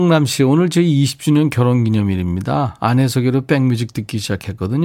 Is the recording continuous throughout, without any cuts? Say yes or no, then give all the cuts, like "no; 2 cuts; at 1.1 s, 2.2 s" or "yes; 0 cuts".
yes; 0 cuts